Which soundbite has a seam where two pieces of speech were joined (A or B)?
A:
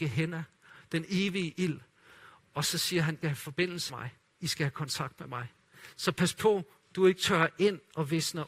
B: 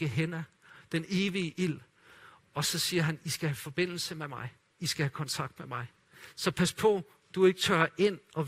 A